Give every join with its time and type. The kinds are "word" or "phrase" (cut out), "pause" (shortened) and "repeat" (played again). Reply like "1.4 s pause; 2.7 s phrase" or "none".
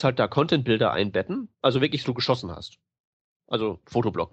1.5 s pause; 2.0 s phrase